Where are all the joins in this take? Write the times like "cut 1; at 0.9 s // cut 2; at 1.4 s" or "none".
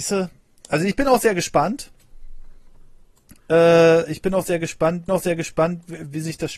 cut 1; at 5.1 s